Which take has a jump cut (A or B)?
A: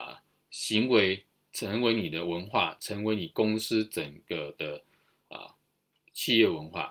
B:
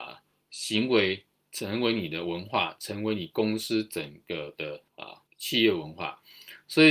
B